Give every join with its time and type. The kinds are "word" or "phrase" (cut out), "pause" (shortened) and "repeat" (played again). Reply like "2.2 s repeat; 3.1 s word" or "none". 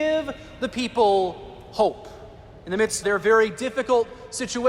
3.0 s word